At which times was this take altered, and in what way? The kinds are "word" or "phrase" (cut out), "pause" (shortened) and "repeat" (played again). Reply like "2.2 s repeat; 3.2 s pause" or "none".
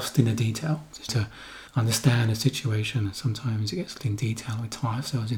1.1 s word; 1.7 s pause; 4.0 s word